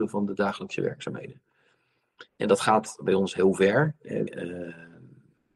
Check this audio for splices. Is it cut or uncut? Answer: cut